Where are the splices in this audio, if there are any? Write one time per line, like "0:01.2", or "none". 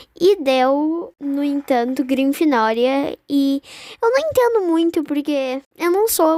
none